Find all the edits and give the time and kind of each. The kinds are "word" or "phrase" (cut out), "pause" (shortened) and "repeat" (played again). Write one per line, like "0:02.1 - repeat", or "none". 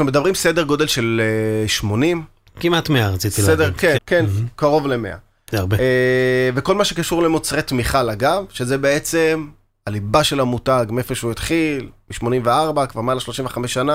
0:04.0 - word